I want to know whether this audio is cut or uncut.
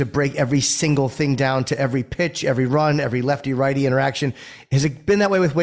uncut